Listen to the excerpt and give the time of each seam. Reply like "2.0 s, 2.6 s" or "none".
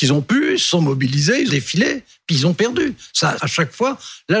1.5 s, 3.4 s